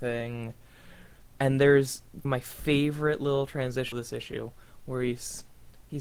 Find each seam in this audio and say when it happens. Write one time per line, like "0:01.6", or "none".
0:02.2
0:03.9